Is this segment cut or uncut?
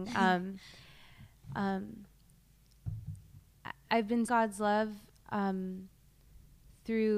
cut